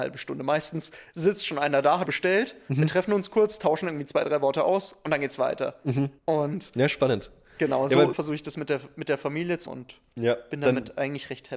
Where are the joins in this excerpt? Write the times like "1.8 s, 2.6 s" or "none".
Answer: 2.1 s, 6.2 s, 8.1 s, 9.7 s